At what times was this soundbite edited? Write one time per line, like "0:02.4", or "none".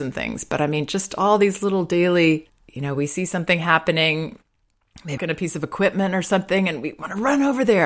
0:05.2